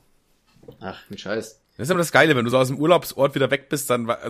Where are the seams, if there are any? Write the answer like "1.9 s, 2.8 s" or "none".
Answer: none